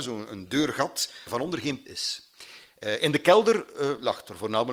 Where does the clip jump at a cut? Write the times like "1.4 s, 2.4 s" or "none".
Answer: 1.3 s, 1.9 s